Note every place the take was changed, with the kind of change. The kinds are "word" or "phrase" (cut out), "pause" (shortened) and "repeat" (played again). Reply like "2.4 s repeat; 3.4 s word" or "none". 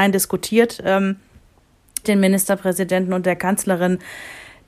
2.0 s word